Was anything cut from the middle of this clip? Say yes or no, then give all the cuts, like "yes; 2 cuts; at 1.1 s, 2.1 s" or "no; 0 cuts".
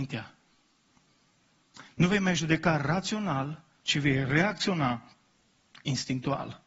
no; 0 cuts